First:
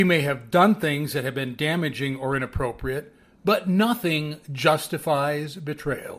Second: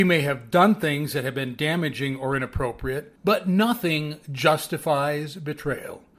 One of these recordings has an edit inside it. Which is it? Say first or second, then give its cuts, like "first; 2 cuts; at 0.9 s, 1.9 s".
second; 1 cut; at 3.2 s